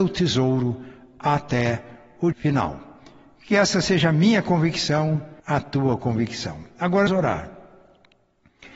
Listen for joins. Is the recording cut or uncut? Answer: cut